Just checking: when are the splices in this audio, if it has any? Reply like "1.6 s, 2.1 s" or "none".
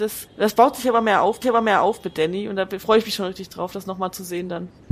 1.4 s